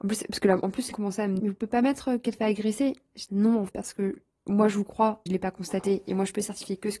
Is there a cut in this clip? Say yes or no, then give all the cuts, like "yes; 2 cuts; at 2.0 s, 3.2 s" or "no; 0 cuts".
yes; 6 cuts; at 0.9 s, 1.4 s, 2.3 s, 3.3 s, 3.7 s, 5.3 s